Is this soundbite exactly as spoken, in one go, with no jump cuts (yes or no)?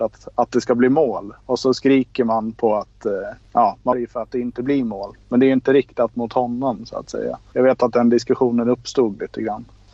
no